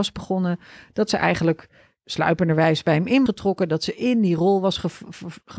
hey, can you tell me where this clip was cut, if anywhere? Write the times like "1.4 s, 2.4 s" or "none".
3.3 s